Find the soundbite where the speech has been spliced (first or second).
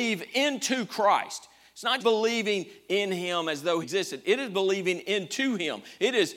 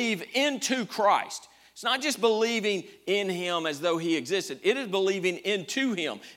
first